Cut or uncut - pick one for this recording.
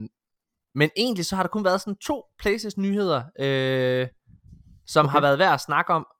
uncut